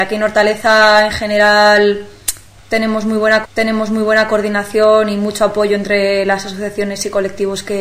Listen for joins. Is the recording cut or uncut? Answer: cut